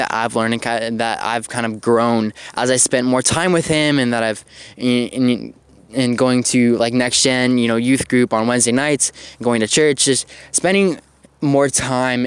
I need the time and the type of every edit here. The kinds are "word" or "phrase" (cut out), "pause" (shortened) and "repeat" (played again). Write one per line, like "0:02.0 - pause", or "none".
none

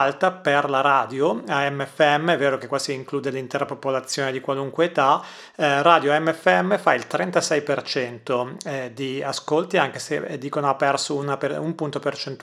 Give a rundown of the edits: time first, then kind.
none

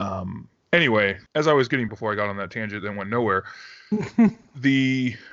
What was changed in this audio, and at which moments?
0:01.3 - pause
0:01.9 - word

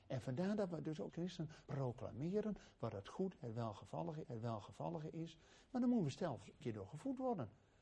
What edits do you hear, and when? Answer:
0:01.1 - word
0:01.7 - word
0:04.2 - repeat
0:06.6 - word

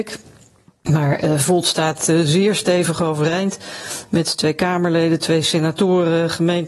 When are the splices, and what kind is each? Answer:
none

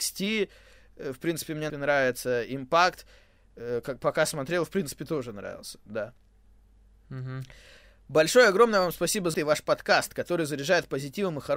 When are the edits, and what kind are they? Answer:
0:01.7 - phrase
0:09.3 - word

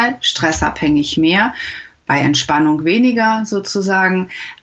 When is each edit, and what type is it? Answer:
none

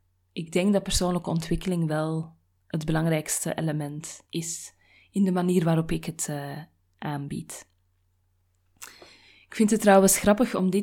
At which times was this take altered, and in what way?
0:04.3 - pause

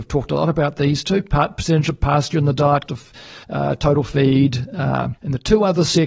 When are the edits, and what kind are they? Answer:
0:02.9 - word
0:03.4 - pause
0:05.2 - pause

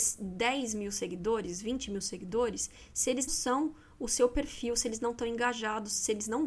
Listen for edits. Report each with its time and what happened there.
0:03.3 - word

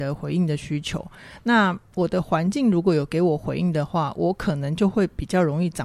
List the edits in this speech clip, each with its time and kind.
none

